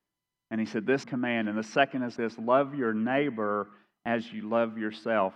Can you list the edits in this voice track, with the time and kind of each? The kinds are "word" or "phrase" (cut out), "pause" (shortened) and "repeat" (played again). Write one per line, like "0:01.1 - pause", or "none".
0:01.0 - phrase
0:02.2 - word